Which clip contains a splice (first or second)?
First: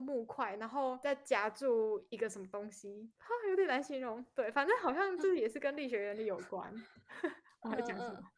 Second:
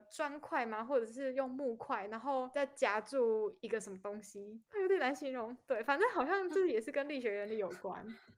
second